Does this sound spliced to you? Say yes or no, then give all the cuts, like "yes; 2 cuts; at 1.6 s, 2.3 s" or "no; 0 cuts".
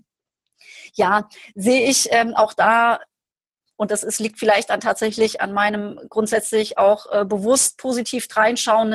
no; 0 cuts